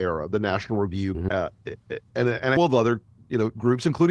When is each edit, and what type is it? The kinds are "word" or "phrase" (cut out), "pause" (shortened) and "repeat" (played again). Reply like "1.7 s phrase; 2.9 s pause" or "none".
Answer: 1.1 s word; 2.1 s word; 2.6 s word